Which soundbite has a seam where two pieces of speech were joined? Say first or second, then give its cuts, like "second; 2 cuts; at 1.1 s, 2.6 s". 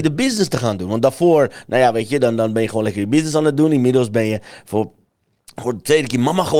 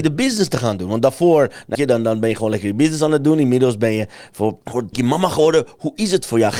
second; 3 cuts; at 1.7 s, 4.6 s, 4.9 s